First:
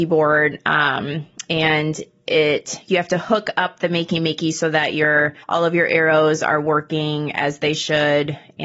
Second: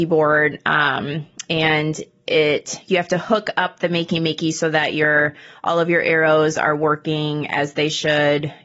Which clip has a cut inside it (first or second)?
first